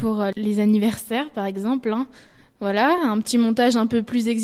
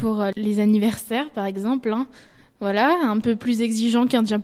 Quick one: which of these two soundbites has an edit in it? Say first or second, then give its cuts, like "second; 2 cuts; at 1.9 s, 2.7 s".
second; 1 cut; at 3.2 s